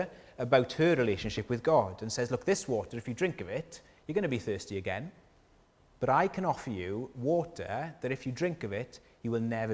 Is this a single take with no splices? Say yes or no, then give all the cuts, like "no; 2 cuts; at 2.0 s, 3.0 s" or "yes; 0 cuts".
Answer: yes; 0 cuts